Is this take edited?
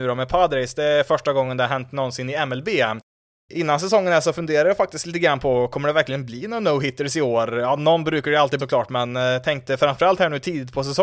yes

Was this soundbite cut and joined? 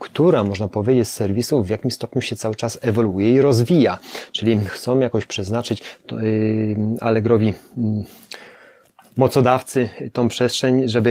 no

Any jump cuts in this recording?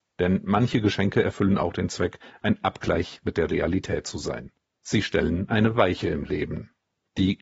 yes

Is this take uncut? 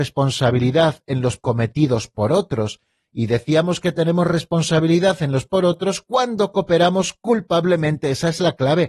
no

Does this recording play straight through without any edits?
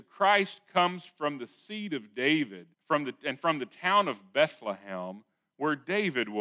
no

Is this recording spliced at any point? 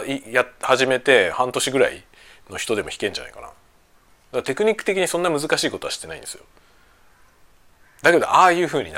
no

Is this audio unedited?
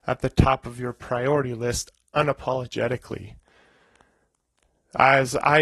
yes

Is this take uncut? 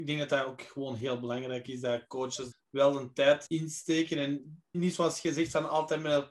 no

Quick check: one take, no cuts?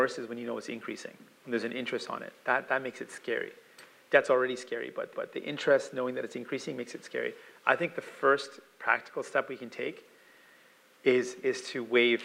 no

